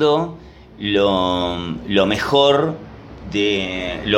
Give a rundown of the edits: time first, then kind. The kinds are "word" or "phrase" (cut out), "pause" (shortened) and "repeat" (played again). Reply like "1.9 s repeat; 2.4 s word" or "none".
none